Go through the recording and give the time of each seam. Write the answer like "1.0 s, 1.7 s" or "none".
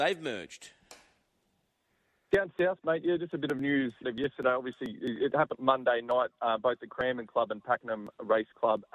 4.0 s, 5.5 s